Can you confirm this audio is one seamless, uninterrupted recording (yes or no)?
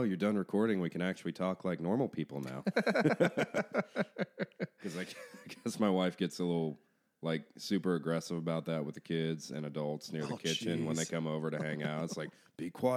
yes